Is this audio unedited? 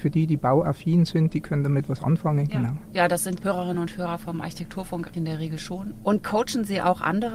yes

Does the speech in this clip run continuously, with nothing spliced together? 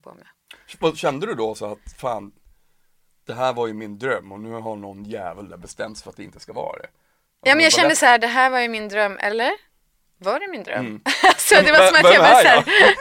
yes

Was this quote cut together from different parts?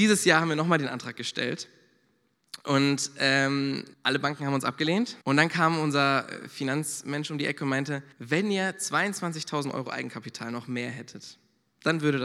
yes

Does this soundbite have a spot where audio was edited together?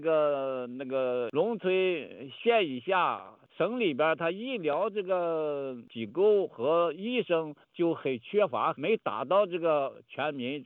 yes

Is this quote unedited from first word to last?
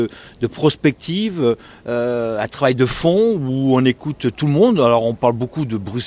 yes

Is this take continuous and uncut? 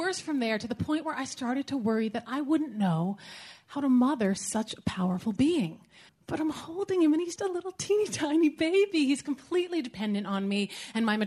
no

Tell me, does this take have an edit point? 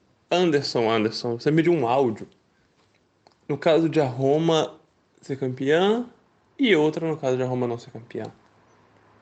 no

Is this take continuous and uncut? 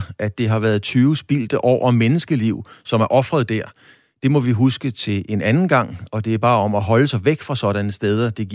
yes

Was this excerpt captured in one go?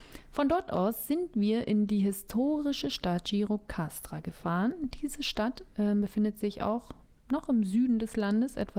yes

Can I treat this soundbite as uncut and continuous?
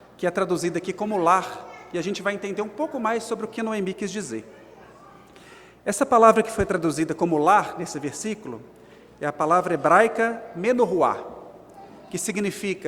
yes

